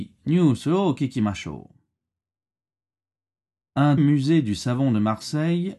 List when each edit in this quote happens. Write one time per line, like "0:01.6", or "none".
0:04.0